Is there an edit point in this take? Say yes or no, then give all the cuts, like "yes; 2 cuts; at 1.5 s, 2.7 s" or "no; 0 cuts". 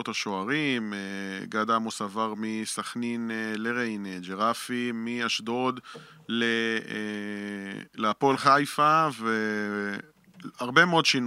no; 0 cuts